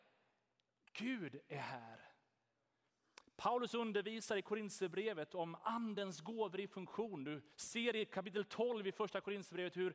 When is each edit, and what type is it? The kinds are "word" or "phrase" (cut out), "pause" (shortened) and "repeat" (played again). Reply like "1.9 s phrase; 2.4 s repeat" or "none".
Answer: 7.5 s pause